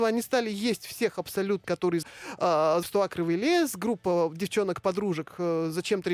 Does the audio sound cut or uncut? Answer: cut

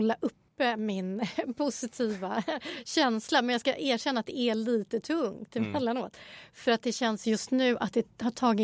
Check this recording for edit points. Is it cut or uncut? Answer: uncut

